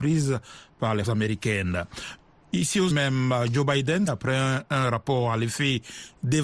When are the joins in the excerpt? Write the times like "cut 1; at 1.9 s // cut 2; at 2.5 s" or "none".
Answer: cut 1; at 1.0 s // cut 2; at 2.9 s // cut 3; at 4.1 s